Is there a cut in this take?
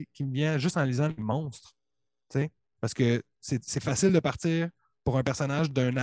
no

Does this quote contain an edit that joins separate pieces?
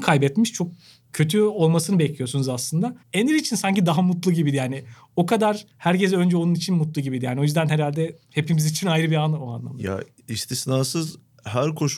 yes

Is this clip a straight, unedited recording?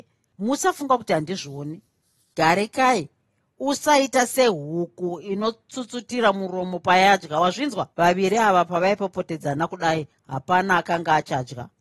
no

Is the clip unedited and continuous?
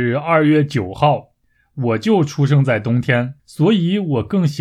no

